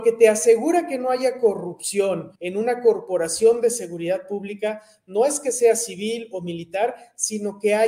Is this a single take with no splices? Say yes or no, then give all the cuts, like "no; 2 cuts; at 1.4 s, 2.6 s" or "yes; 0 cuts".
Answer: no; 1 cut; at 2.3 s